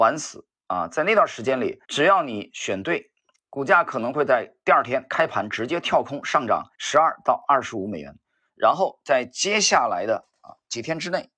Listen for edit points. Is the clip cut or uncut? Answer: cut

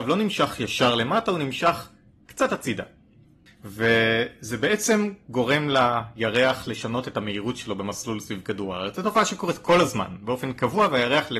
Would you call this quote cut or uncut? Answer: uncut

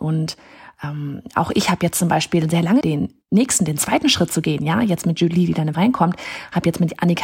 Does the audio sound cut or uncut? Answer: cut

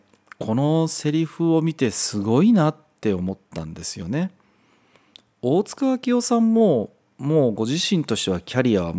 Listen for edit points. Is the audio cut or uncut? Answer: uncut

